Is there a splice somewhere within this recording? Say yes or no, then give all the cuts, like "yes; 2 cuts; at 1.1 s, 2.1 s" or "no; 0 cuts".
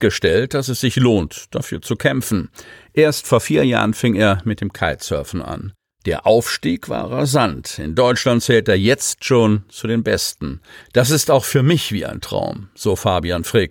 no; 0 cuts